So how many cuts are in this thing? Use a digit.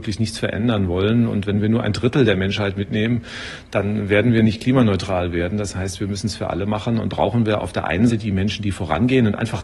2